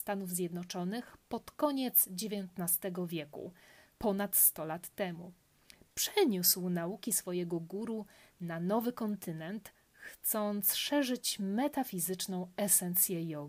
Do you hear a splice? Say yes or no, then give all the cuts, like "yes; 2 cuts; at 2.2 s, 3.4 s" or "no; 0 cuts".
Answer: no; 0 cuts